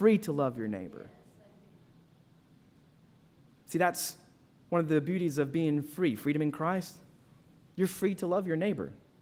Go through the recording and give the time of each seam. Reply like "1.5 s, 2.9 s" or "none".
none